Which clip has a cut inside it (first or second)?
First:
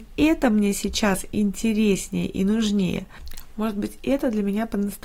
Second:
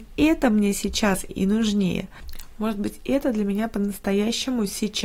second